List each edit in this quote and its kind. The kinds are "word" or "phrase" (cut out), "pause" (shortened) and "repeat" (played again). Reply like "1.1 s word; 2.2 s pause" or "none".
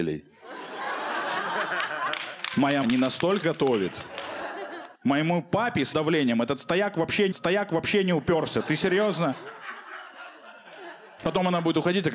2.8 s word; 3.4 s word; 4.9 s pause; 5.9 s word; 7.3 s repeat